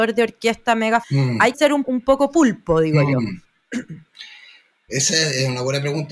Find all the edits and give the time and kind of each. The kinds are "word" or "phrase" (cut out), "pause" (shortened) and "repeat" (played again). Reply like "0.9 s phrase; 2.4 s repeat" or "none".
1.0 s word; 1.5 s word; 1.8 s word

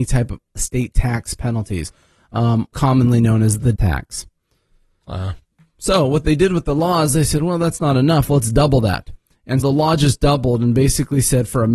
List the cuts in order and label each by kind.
2.7 s word; 3.7 s word; 9.6 s word

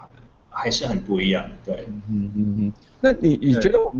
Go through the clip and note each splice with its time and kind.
none

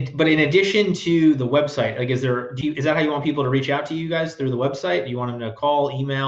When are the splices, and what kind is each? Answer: 2.6 s phrase

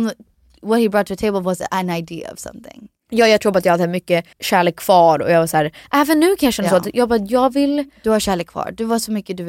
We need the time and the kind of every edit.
4.3 s pause

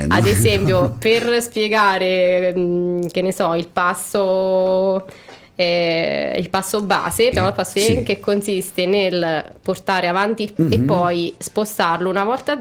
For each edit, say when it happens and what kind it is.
7.3 s word; 7.7 s word; 10.6 s word

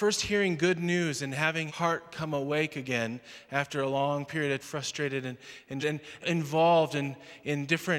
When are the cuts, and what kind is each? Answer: 1.7 s word; 4.6 s phrase; 5.8 s word; 6.2 s phrase

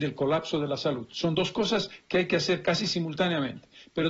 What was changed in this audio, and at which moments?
none

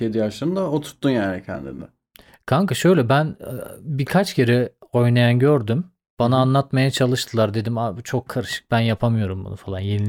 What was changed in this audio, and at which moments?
none

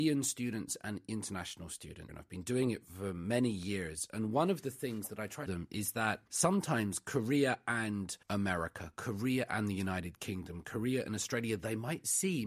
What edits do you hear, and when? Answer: 2.1 s word; 5.5 s phrase; 6.3 s pause; 8.2 s pause

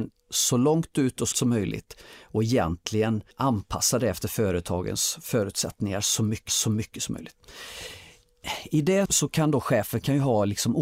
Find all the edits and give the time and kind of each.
1.3 s word; 3.3 s pause; 6.5 s repeat; 9.1 s word

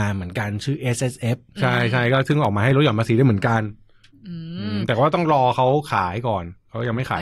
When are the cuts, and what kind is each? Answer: none

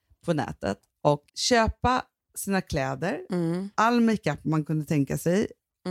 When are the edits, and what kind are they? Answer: 1.3 s pause

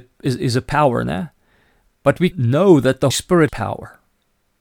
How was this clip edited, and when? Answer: 2.3 s word; 3.1 s word; 3.5 s word

